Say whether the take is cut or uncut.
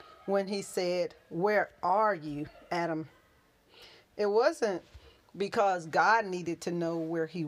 uncut